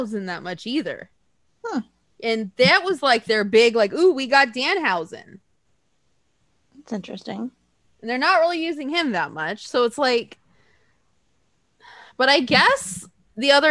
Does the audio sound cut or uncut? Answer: uncut